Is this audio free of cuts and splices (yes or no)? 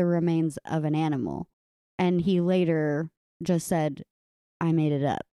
yes